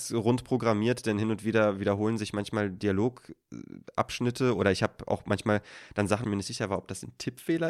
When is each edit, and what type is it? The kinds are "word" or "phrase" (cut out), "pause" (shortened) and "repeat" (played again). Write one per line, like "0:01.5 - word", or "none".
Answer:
0:06.2 - phrase